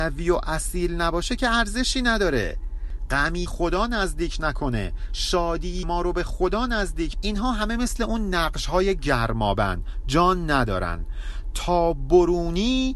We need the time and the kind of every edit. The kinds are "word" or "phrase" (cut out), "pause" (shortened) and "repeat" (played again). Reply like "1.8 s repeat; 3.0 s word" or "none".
3.5 s phrase; 5.8 s word; 7.1 s word